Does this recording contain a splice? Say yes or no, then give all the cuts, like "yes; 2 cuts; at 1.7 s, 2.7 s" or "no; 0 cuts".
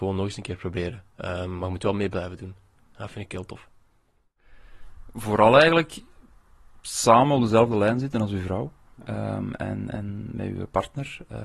no; 0 cuts